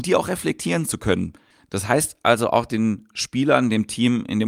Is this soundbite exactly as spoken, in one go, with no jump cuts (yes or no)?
yes